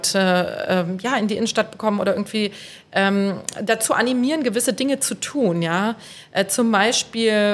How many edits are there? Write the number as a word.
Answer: zero